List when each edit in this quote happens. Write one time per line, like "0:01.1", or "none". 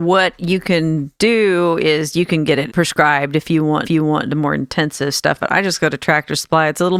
0:02.7
0:03.8